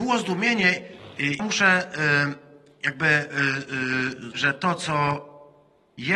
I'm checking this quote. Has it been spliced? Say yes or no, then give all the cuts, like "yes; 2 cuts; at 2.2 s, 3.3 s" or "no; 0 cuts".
yes; 2 cuts; at 1.4 s, 4.3 s